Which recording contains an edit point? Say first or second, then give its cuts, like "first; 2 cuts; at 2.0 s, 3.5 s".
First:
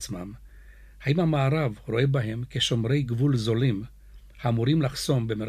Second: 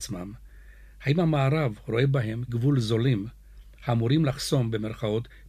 second; 1 cut; at 2.5 s